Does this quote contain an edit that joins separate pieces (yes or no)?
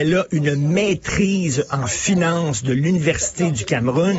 no